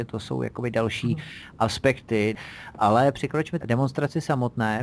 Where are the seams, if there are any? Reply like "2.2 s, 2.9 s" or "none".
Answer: 3.6 s

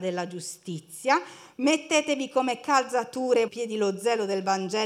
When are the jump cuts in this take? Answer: 3.5 s

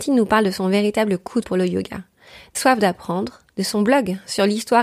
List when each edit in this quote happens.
1.4 s, 2.5 s, 3.5 s

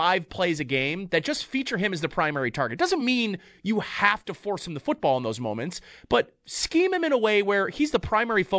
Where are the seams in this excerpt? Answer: none

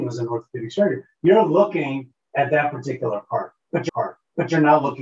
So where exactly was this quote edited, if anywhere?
3.9 s

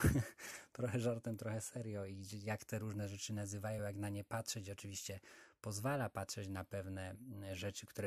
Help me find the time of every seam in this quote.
none

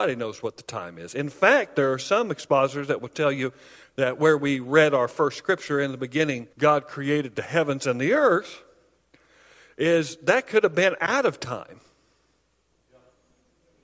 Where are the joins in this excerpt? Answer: 6.5 s

